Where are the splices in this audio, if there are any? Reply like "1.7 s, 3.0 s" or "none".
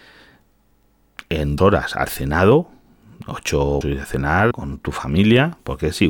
1.6 s, 3.8 s, 4.5 s